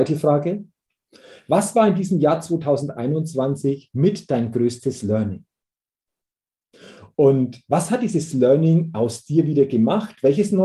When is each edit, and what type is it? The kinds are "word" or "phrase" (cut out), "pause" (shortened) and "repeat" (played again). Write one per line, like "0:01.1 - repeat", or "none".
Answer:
none